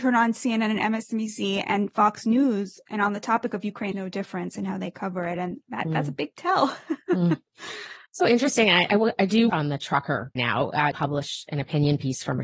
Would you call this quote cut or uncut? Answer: cut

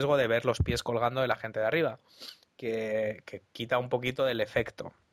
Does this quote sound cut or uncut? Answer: uncut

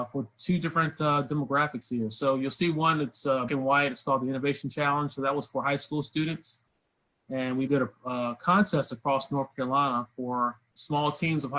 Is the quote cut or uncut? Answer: cut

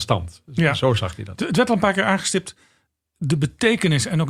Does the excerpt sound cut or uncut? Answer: uncut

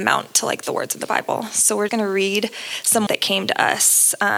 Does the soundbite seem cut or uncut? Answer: cut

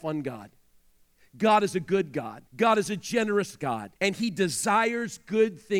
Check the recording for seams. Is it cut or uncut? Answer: cut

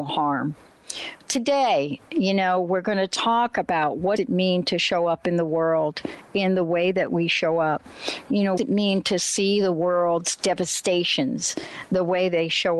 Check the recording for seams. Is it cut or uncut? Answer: cut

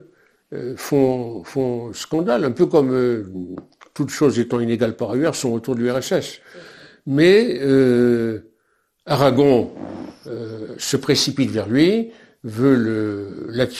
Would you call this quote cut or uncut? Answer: uncut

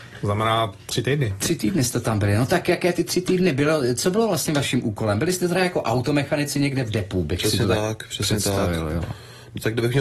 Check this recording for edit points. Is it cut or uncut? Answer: uncut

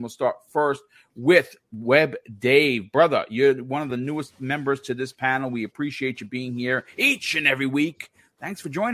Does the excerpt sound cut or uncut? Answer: uncut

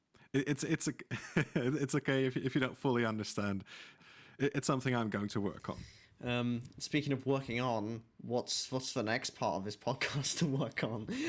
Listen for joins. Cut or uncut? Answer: uncut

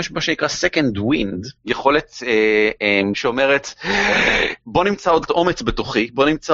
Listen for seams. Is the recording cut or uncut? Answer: cut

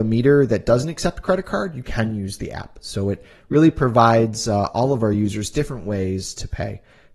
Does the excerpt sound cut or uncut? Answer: uncut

